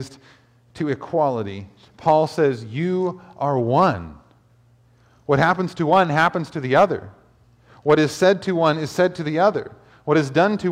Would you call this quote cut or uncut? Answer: uncut